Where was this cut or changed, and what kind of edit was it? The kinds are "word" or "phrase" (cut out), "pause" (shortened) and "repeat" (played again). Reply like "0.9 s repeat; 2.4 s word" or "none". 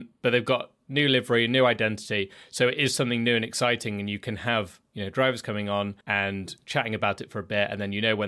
6.0 s pause